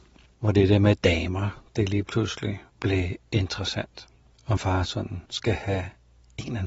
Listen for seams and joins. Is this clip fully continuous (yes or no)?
no